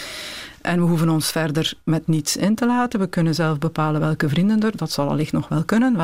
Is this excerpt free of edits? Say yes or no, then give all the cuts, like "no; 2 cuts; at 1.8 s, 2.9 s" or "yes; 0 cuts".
yes; 0 cuts